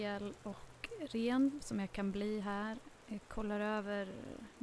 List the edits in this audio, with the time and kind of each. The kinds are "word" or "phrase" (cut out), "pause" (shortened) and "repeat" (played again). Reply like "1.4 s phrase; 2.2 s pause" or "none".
1.6 s word